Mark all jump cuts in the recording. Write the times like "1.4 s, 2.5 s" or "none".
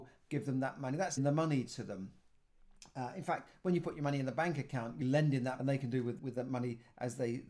1.2 s, 5.0 s, 5.6 s, 6.2 s